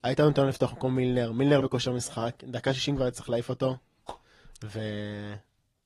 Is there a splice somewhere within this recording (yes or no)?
yes